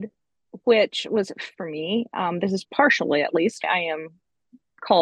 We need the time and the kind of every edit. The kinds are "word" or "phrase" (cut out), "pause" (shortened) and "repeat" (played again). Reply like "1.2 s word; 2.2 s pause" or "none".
1.5 s word; 2.6 s word; 3.6 s word